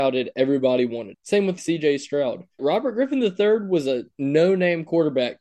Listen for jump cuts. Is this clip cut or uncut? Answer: cut